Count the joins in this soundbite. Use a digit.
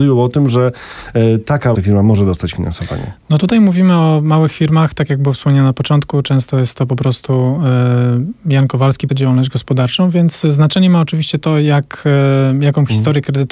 2